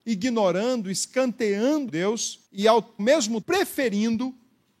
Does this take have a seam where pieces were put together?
yes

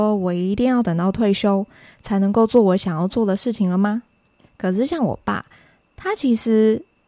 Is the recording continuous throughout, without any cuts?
yes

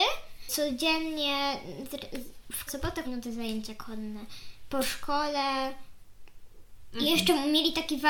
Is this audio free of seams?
no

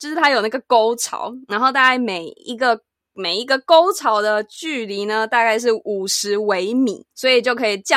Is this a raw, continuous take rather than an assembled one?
yes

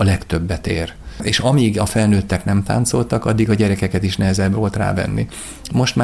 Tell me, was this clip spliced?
no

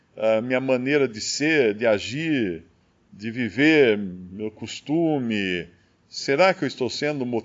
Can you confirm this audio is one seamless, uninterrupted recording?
yes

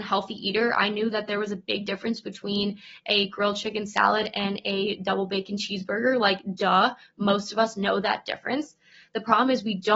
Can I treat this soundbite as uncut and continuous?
yes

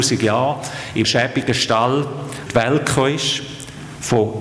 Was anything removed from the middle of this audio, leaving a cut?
yes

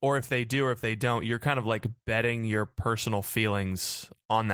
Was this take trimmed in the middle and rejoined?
no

